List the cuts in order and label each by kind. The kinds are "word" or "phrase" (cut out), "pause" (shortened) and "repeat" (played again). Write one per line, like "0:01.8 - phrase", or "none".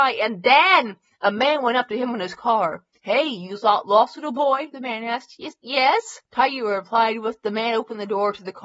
0:06.3 - pause